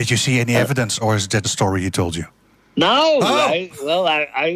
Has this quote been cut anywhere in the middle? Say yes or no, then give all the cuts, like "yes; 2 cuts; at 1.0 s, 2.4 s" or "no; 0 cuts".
yes; 2 cuts; at 1.0 s, 1.4 s